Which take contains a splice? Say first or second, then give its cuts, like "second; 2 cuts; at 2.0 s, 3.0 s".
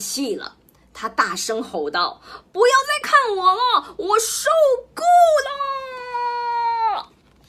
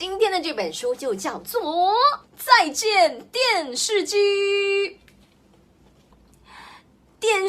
second; 1 cut; at 2.2 s